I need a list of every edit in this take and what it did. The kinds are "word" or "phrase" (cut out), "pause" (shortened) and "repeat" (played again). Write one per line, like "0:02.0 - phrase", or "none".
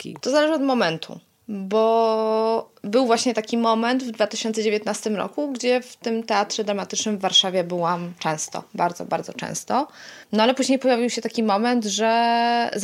0:10.2 - pause